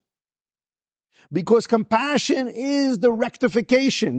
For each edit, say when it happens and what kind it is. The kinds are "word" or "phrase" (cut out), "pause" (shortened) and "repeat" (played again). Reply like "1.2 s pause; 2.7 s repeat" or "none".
none